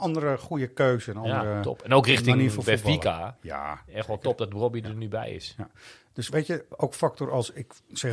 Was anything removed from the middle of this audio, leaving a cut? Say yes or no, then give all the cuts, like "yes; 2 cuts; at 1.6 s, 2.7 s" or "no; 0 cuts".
no; 0 cuts